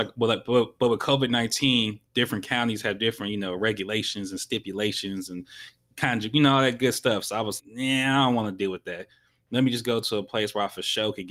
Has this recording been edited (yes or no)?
yes